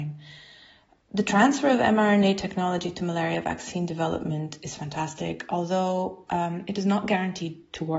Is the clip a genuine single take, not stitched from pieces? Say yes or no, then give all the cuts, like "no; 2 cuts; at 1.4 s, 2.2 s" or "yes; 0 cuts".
yes; 0 cuts